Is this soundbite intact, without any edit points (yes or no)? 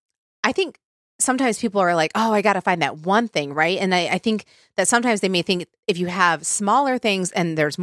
yes